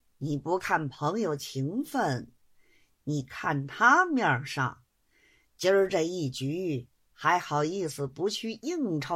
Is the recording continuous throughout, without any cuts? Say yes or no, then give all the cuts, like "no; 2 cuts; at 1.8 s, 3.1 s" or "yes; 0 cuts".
yes; 0 cuts